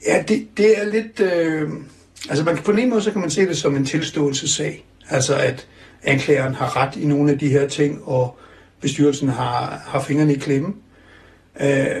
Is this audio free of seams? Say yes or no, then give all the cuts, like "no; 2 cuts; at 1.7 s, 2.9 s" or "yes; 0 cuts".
yes; 0 cuts